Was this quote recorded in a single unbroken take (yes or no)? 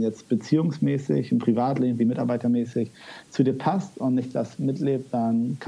yes